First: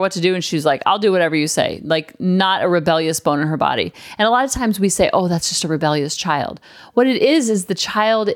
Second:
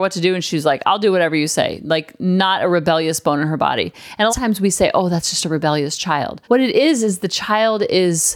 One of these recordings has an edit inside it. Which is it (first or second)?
second